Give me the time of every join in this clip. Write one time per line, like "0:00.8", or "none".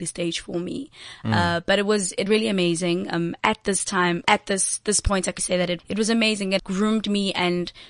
0:02.3
0:03.4
0:04.2
0:05.4
0:05.8
0:06.6